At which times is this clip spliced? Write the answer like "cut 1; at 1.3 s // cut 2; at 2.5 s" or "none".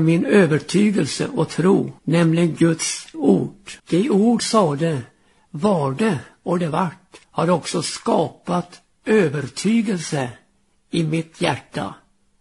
cut 1; at 2.0 s // cut 2; at 3.1 s // cut 3; at 3.8 s // cut 4; at 4.4 s // cut 5; at 7.2 s